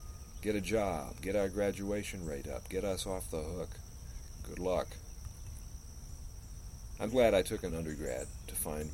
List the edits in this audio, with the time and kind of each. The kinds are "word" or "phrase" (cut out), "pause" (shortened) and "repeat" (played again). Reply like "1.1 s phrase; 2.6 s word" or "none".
7.1 s word; 7.7 s phrase